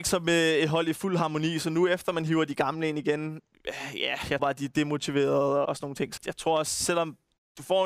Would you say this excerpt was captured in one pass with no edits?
no; 3 cuts; at 4.4 s, 5.7 s, 6.2 s

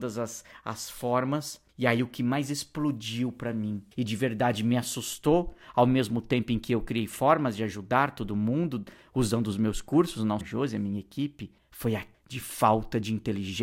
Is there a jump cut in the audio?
yes; 5 cuts; at 1.7 s, 3.9 s, 10.4 s, 11.6 s, 12.1 s

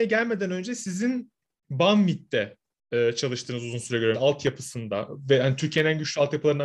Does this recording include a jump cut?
yes; 1 cut; at 4.1 s

